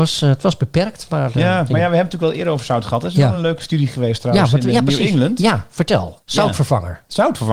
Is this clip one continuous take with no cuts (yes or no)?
yes